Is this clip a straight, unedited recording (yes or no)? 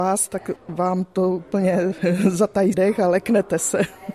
no